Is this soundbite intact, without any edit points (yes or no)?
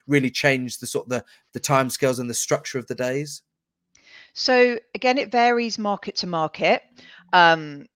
yes